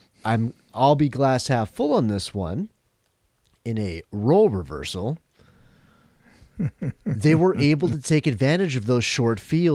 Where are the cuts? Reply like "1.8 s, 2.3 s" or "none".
none